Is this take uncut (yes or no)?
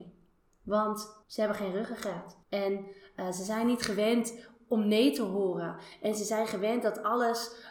no